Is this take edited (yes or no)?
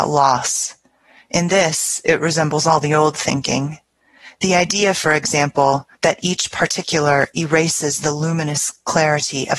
yes